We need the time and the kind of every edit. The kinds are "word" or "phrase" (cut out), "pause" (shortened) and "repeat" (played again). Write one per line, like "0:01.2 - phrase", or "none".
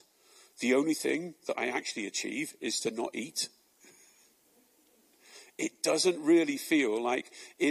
none

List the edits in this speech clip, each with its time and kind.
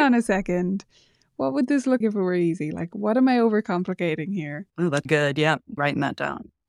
0:02.0 - word
0:04.7 - pause
0:05.1 - word
0:05.8 - word

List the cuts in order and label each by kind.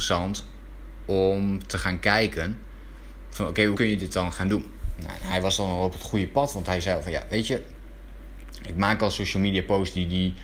0:03.7 - word

